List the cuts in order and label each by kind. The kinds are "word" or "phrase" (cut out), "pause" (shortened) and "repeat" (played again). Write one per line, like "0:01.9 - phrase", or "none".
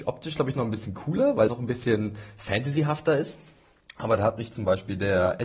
0:01.5 - word

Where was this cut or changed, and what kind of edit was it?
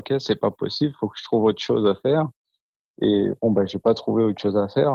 none

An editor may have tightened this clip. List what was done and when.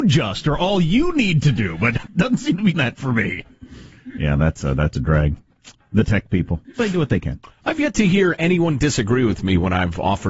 0:02.1 - word
0:02.7 - word
0:06.8 - word

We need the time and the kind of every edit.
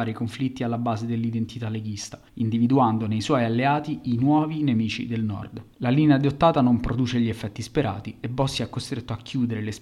0:02.3 - pause

